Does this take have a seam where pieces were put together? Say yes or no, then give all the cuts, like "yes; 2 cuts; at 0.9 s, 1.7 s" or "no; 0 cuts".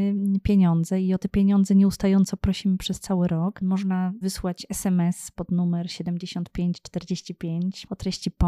yes; 1 cut; at 4.2 s